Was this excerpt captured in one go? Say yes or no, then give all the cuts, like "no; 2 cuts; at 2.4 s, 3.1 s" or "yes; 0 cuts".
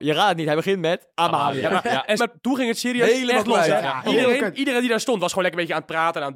no; 2 cuts; at 2.2 s, 4.0 s